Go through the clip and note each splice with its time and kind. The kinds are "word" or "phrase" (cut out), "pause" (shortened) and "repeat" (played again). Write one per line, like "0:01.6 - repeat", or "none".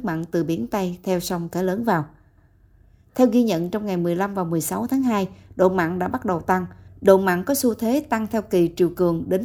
none